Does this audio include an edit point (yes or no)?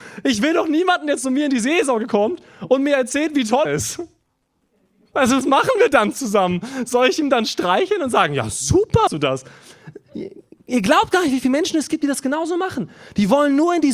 yes